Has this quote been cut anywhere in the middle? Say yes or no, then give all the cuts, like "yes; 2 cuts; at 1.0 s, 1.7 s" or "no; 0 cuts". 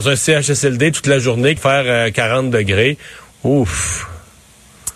yes; 1 cut; at 1.6 s